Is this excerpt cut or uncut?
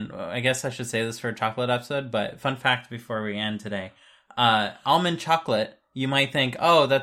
uncut